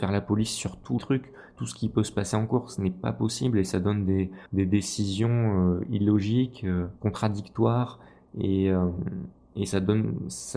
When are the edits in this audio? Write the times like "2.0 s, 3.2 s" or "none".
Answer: 1.0 s, 4.5 s, 7.0 s, 9.4 s